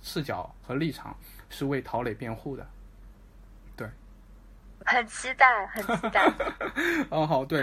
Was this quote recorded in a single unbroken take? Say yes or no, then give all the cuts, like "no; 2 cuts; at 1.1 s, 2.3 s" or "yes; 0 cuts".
no; 1 cut; at 4.8 s